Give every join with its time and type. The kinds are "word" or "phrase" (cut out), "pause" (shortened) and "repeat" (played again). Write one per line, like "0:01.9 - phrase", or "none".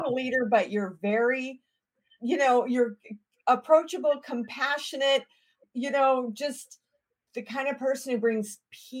none